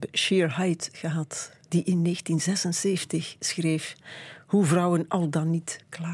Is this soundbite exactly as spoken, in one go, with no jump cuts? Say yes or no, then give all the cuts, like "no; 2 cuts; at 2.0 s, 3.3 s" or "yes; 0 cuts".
yes; 0 cuts